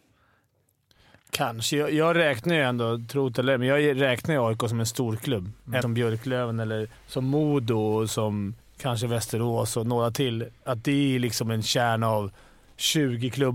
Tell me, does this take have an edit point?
yes; 3 cuts; at 5.8 s, 7.0 s, 8.6 s

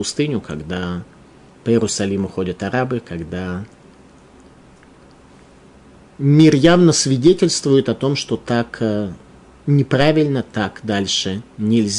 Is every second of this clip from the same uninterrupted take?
yes; 0 cuts

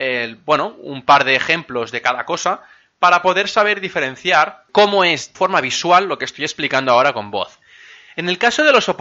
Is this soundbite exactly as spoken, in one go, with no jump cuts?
no; 1 cut; at 5.3 s

